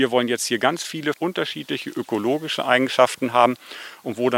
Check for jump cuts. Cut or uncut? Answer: cut